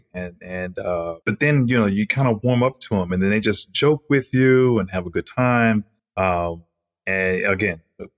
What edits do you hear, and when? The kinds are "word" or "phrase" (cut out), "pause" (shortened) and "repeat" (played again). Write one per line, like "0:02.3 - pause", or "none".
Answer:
0:01.2 - pause
0:06.0 - pause